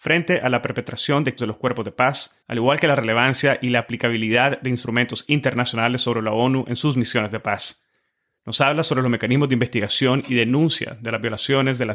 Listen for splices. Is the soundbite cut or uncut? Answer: cut